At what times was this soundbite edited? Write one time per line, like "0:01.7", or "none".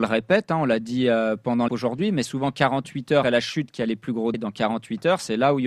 0:01.7
0:02.2
0:03.2
0:04.3